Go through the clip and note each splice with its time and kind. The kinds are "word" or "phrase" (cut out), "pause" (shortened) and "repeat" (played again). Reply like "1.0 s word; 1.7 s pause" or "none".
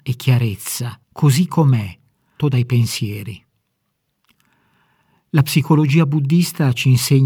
1.0 s pause; 2.4 s phrase